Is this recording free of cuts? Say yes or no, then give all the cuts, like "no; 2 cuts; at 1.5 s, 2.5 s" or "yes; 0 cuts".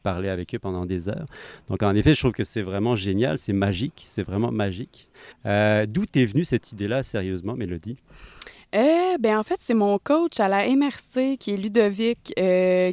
no; 1 cut; at 5.3 s